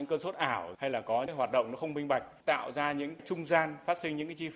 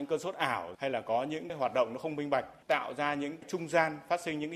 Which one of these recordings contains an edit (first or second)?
first